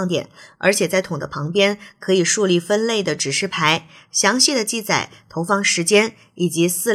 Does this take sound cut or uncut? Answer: uncut